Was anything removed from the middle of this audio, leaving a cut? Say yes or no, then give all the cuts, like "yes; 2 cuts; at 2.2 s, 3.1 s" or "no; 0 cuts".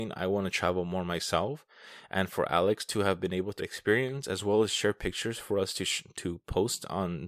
yes; 1 cut; at 3.6 s